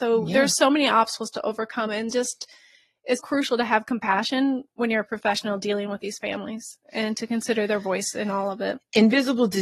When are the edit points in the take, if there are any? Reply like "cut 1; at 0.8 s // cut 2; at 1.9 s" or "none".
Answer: cut 1; at 3.2 s